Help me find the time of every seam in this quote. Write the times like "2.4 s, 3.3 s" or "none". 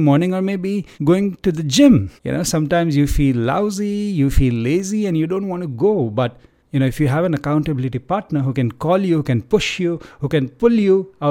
0.9 s, 2.2 s, 6.6 s